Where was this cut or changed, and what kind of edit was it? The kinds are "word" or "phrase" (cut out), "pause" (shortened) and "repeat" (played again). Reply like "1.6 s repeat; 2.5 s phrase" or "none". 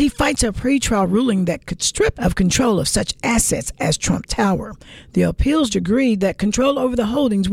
2.1 s word; 5.7 s word